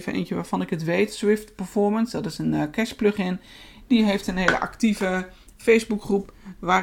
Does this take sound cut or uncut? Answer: uncut